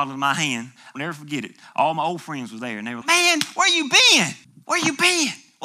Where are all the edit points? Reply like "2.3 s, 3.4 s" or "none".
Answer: 1.0 s, 3.0 s, 4.4 s